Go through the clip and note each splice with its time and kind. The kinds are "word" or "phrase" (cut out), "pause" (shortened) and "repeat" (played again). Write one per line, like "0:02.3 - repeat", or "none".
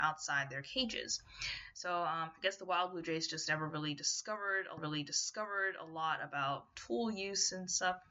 0:04.8 - repeat